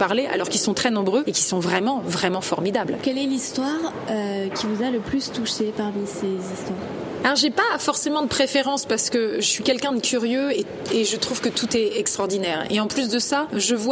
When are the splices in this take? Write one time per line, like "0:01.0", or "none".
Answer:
none